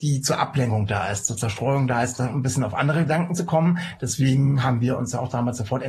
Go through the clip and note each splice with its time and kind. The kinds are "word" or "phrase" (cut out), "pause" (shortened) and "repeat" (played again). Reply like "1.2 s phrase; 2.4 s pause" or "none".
none